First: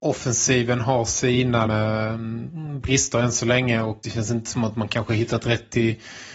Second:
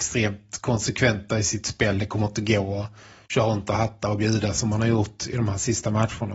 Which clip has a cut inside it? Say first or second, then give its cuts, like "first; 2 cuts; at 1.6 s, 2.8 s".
first; 2 cuts; at 1.7 s, 4.0 s